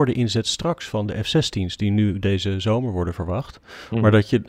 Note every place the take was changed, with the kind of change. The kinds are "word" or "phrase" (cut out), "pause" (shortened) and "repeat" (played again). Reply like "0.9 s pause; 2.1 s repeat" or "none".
none